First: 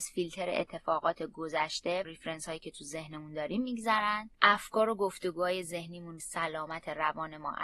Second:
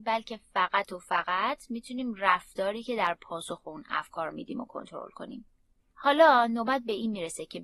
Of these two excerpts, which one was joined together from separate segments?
first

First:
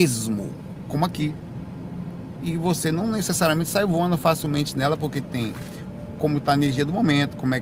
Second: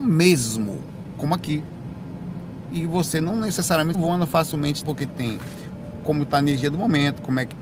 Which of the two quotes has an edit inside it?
second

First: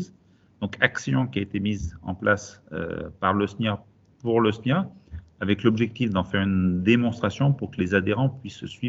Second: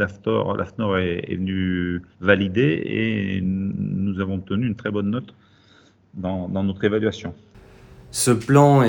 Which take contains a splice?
second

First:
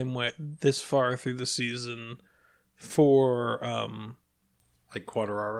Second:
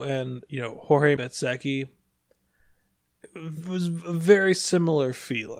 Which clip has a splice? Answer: second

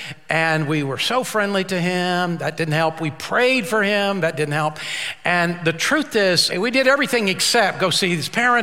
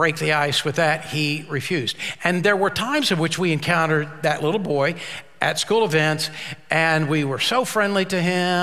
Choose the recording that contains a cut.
first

